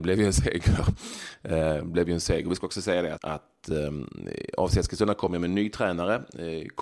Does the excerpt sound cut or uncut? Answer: cut